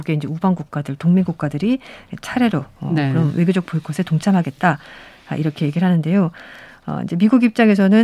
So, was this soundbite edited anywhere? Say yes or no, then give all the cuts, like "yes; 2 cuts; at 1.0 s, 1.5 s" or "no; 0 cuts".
no; 0 cuts